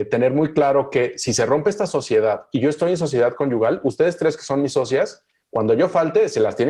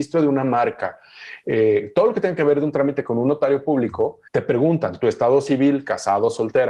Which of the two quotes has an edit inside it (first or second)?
second